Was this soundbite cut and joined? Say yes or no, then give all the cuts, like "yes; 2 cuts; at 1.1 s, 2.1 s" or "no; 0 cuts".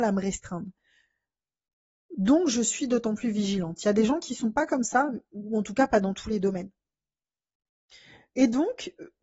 no; 0 cuts